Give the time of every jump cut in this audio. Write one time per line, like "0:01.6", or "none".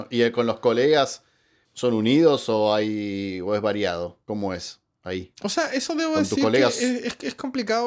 0:01.6
0:04.2